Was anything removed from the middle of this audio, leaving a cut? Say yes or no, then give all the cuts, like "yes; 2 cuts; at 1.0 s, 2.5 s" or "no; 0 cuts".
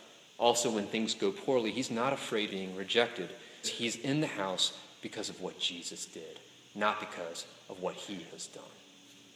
yes; 3 cuts; at 2.5 s, 3.6 s, 8.3 s